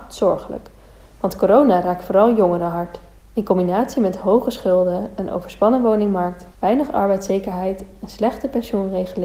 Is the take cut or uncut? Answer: cut